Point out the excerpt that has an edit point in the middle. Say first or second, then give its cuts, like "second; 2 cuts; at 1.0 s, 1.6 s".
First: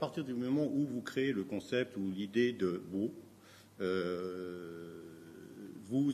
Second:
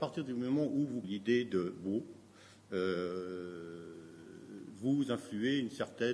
second; 1 cut; at 1.0 s